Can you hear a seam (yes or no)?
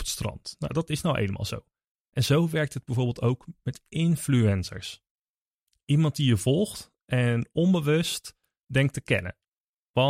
no